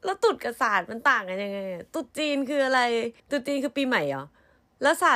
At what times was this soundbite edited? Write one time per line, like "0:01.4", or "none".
0:01.9
0:03.2